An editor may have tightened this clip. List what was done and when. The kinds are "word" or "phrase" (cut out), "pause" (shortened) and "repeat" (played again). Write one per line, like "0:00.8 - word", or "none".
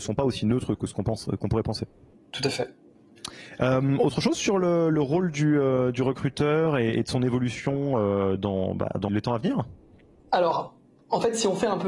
0:09.1 - word